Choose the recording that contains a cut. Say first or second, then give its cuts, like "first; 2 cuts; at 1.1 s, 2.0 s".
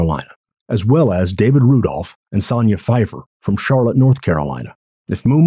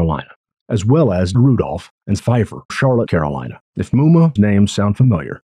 second; 6 cuts; at 1.3 s, 2.2 s, 2.7 s, 3.1 s, 3.7 s, 4.4 s